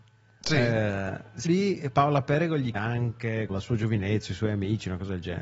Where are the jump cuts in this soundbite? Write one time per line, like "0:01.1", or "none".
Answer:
0:01.4
0:02.7
0:03.5